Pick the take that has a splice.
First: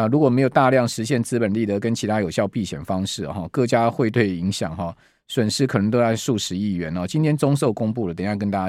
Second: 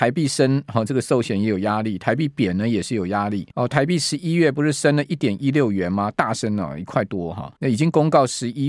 second; 2 cuts; at 3.5 s, 7.6 s

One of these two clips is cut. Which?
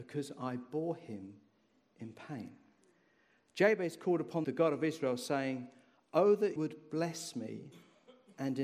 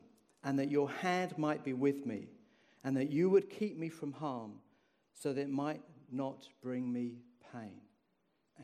first; 2 cuts; at 4.4 s, 6.6 s

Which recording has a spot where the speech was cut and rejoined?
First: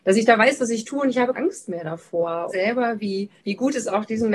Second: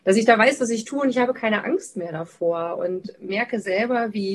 first; 3 cuts; at 1.3 s, 2.5 s, 3.4 s

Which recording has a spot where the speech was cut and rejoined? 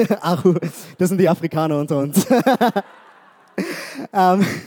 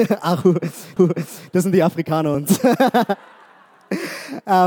second; 2 cuts; at 1.0 s, 2.3 s

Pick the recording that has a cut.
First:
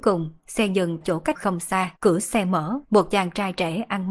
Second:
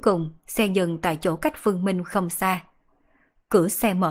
first; 4 cuts; at 1.0 s, 1.3 s, 2.0 s, 2.8 s

